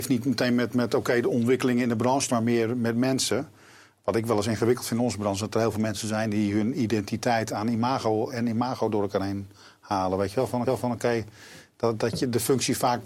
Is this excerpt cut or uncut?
cut